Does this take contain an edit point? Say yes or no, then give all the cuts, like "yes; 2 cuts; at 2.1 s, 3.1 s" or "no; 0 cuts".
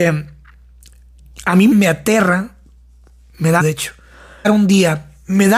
yes; 3 cuts; at 1.7 s, 3.6 s, 4.4 s